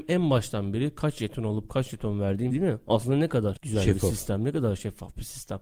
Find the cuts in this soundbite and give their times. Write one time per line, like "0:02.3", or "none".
0:02.5